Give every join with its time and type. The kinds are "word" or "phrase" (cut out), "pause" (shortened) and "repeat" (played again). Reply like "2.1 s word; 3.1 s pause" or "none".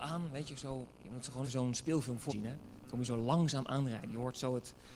0.9 s pause; 1.4 s word; 2.3 s word

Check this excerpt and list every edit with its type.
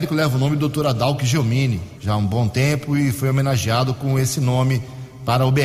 2.0 s phrase

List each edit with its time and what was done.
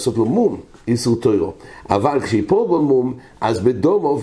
none

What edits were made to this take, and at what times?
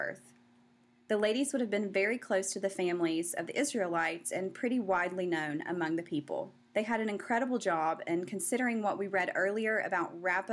6.7 s pause

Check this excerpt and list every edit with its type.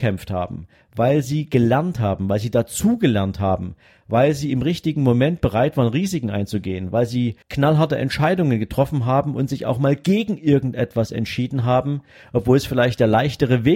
7.4 s pause

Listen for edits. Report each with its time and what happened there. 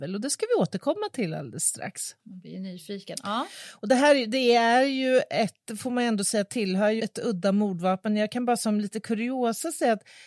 2.2 s pause; 7.0 s word

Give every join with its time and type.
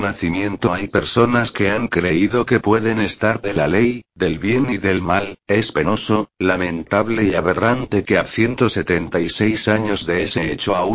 3.4 s phrase

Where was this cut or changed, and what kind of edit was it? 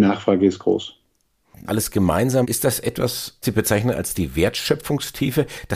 1.7 s word; 2.4 s word; 3.4 s word

